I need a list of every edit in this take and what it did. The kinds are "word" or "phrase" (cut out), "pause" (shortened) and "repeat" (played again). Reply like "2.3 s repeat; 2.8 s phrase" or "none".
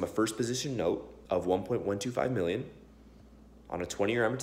1.3 s pause